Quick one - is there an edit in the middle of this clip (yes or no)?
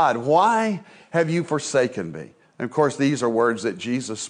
no